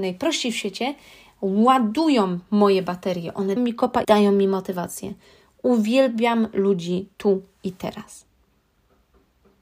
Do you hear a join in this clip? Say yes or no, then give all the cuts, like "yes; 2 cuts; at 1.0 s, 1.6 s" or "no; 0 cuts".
yes; 2 cuts; at 3.6 s, 4.0 s